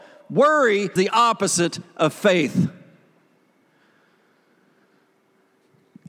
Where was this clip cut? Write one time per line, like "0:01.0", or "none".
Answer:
0:01.0